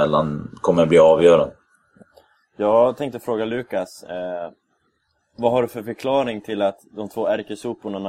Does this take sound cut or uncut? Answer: uncut